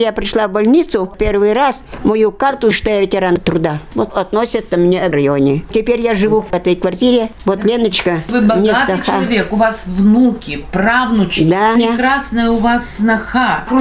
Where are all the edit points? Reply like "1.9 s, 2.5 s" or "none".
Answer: 2.7 s, 4.1 s, 5.1 s